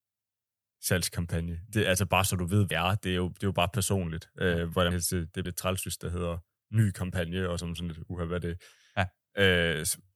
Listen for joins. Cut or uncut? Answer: cut